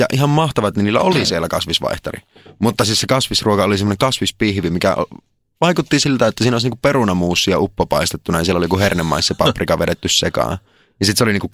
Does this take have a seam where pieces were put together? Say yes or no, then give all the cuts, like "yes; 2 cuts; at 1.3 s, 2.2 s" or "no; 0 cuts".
no; 0 cuts